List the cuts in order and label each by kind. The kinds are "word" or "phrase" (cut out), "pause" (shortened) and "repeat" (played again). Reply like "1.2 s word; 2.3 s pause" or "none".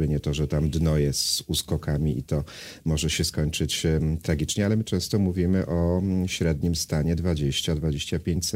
none